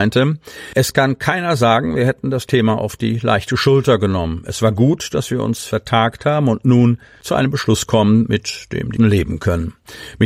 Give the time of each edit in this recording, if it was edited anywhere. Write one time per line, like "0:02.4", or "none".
0:09.0